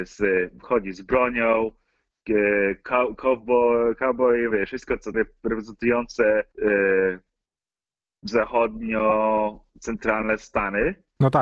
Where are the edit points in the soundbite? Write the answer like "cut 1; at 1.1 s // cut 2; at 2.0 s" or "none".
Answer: cut 1; at 4.5 s // cut 2; at 5.1 s // cut 3; at 6.5 s

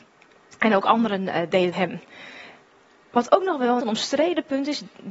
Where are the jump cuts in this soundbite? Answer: cut 1; at 1.7 s // cut 2; at 3.8 s

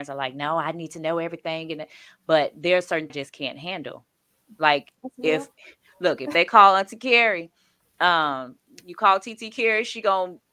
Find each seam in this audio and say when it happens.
cut 1; at 3.1 s

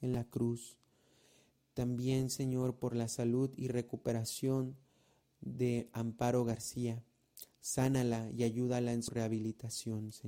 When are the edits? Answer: none

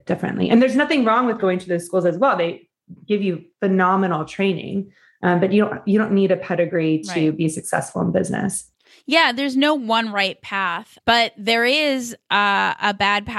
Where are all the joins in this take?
none

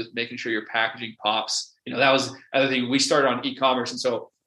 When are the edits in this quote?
cut 1; at 1.8 s

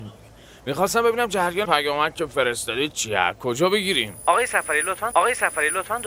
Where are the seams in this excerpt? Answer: cut 1; at 1.6 s // cut 2; at 5.1 s

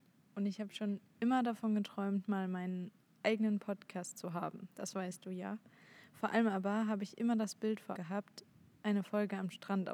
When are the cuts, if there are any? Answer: cut 1; at 8.0 s

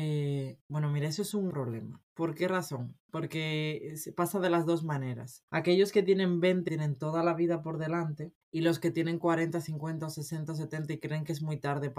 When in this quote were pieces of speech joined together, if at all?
cut 1; at 1.5 s // cut 2; at 2.1 s // cut 3; at 5.5 s // cut 4; at 6.7 s // cut 5; at 8.4 s

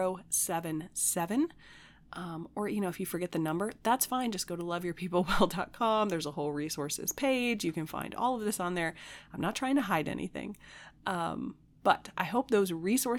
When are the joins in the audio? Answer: none

